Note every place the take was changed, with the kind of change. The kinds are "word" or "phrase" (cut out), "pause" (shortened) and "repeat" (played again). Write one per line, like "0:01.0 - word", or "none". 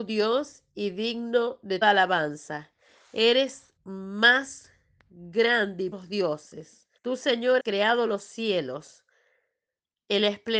0:01.8 - word
0:03.8 - pause
0:05.9 - phrase
0:07.0 - pause
0:07.6 - word